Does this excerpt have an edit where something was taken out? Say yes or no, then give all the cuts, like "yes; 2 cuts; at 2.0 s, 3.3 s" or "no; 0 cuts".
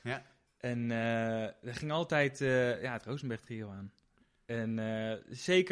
no; 0 cuts